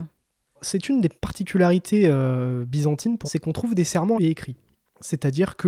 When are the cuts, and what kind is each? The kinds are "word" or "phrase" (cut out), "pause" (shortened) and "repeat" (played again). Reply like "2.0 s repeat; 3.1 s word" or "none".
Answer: 1.2 s pause; 3.2 s word; 4.1 s phrase